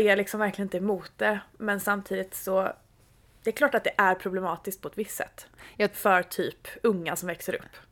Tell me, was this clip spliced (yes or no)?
no